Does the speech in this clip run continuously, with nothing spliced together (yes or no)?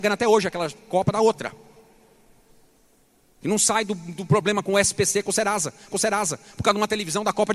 no